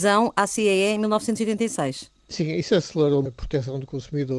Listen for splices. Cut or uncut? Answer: cut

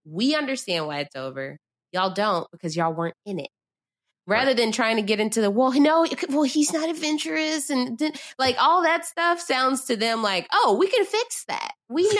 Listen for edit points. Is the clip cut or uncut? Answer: uncut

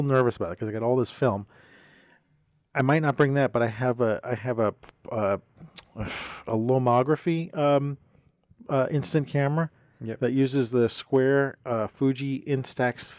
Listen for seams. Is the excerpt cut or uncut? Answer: uncut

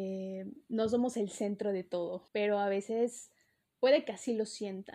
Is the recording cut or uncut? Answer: cut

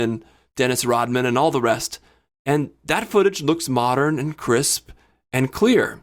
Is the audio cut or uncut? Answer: uncut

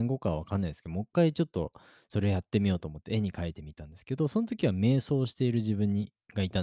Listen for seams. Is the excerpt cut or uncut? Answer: uncut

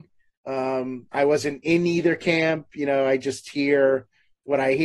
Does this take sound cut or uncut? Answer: cut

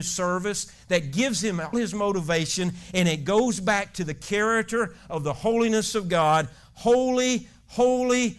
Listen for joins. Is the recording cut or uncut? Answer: cut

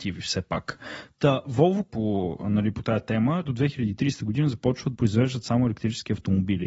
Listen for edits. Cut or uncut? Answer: cut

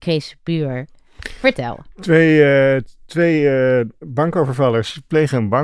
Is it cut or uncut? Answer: uncut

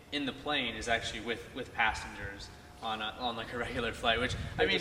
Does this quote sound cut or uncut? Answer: uncut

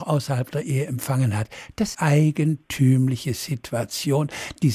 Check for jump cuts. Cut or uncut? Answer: cut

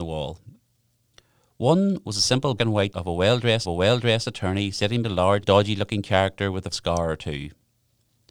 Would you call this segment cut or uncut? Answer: cut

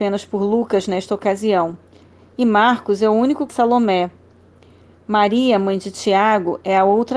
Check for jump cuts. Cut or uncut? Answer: cut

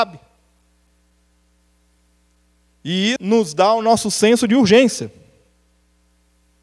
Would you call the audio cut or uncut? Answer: cut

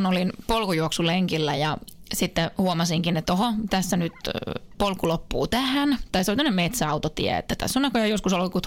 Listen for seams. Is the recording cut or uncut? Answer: uncut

